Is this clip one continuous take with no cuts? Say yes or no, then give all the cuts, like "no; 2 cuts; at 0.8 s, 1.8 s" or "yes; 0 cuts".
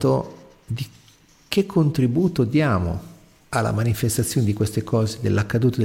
yes; 0 cuts